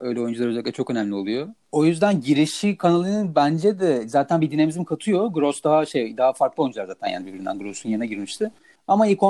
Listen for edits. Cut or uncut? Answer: cut